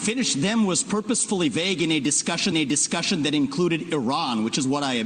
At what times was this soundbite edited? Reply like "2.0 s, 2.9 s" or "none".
2.5 s

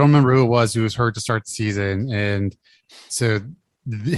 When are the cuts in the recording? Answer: none

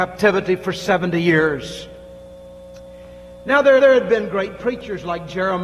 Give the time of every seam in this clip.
3.8 s

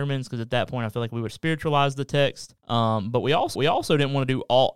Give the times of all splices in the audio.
1.3 s, 2.6 s, 3.6 s

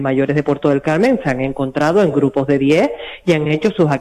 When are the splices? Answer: none

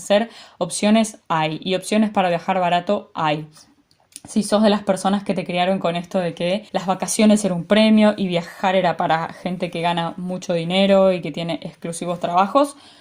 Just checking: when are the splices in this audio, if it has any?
6.7 s

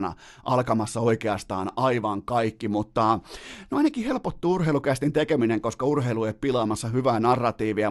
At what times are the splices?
none

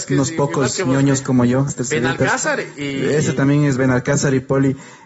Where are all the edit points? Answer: 1.7 s

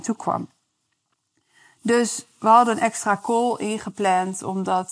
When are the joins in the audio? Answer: none

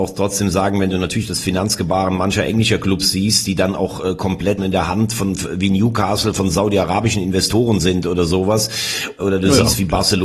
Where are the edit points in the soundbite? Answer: 4.6 s, 9.2 s

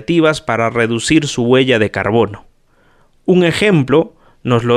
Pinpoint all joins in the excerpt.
none

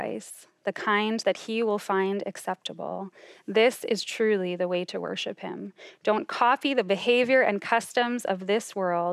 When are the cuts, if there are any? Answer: none

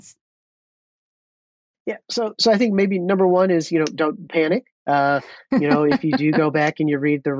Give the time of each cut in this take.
4.3 s

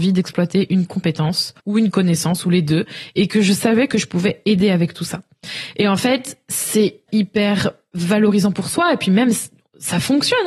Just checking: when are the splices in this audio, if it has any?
1.6 s, 7.1 s

